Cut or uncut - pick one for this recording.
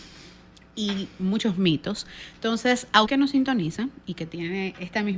cut